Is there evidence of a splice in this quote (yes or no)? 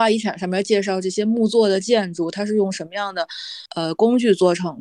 yes